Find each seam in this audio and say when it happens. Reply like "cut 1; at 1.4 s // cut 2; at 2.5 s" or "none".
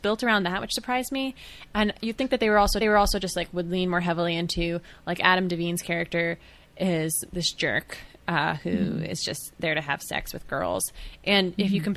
cut 1; at 2.8 s